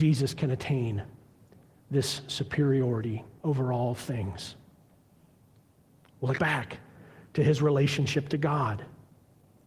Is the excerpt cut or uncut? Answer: cut